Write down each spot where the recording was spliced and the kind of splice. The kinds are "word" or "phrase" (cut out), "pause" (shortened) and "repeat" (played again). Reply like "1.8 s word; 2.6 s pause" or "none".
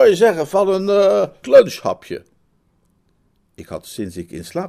1.4 s word